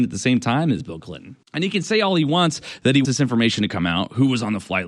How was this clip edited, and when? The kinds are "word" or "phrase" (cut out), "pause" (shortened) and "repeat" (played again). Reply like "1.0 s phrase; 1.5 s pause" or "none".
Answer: 1.4 s pause; 3.0 s word